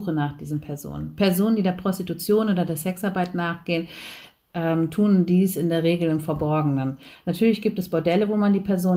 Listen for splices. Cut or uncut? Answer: uncut